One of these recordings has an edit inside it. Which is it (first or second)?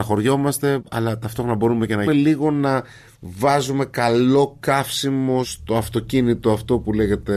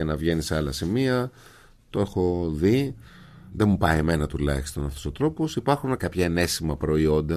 first